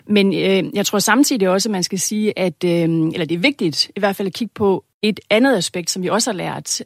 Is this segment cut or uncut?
cut